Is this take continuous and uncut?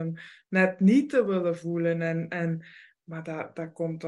yes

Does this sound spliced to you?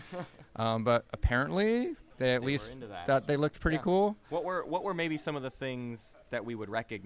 yes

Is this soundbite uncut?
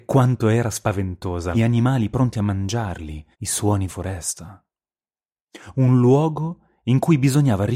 no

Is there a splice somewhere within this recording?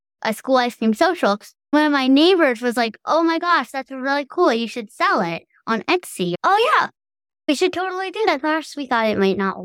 no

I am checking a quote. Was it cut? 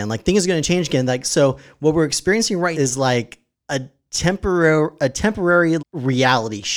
yes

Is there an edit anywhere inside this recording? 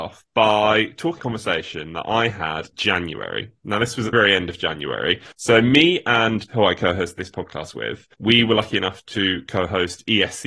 yes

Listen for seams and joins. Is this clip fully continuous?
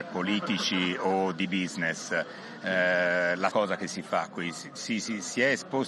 no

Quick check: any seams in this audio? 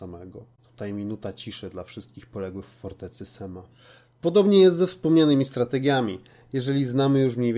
no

